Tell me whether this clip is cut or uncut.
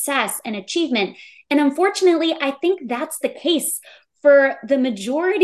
uncut